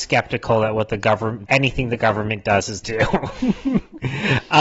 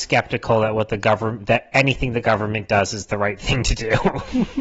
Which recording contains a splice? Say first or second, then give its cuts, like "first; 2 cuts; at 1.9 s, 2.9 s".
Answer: first; 2 cuts; at 1.5 s, 2.8 s